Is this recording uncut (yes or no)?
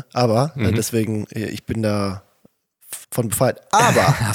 no